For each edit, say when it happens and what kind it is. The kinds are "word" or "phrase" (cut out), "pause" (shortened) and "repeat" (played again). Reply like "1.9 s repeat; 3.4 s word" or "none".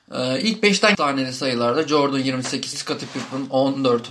0.9 s phrase; 2.7 s word